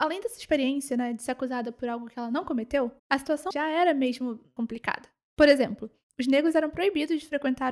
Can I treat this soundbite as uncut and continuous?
no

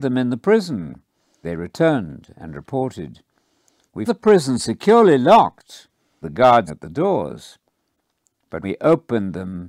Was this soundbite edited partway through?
yes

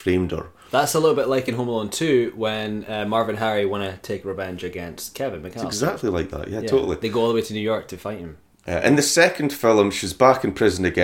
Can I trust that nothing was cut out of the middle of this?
yes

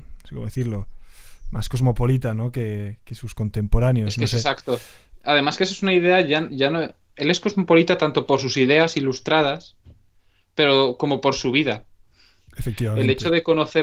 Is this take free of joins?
yes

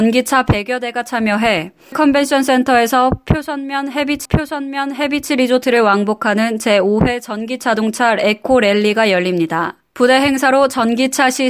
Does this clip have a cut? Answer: yes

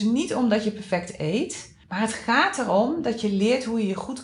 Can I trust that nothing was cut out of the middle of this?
no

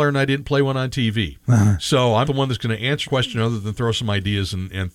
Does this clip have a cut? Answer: yes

